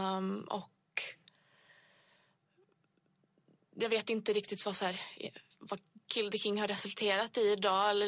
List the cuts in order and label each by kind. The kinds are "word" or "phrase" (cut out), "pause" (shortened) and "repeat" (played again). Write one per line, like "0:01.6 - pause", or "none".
none